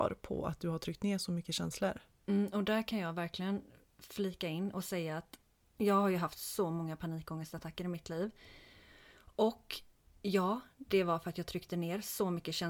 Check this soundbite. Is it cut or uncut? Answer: uncut